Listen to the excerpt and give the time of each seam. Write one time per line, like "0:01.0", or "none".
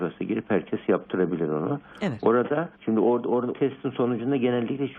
0:02.7
0:03.5